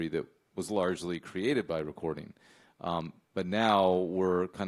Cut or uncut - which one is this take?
uncut